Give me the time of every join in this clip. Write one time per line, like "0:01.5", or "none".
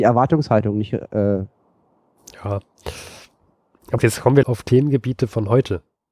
0:04.0
0:04.4